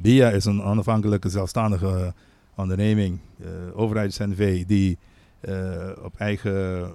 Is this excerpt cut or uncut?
uncut